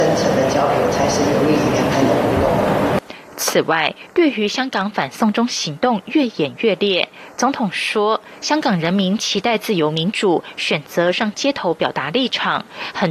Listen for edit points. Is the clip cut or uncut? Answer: uncut